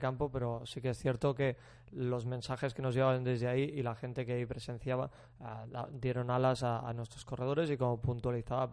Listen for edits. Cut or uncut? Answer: uncut